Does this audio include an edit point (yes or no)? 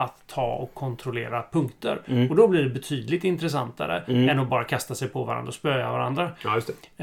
no